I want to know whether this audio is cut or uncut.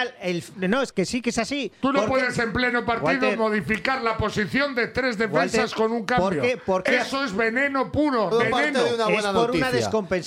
cut